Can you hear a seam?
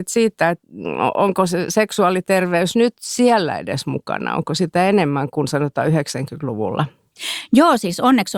no; 0 cuts

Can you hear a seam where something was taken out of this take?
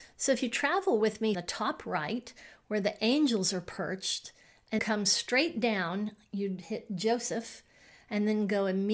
yes; 2 cuts; at 1.3 s, 4.8 s

